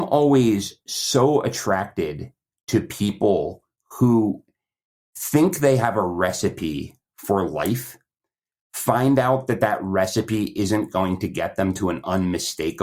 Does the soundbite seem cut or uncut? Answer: uncut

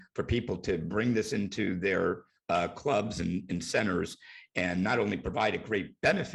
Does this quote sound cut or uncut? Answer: uncut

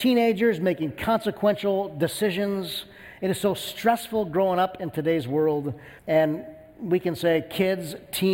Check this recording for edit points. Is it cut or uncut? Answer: cut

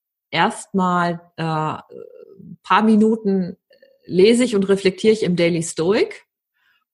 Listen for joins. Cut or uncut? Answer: uncut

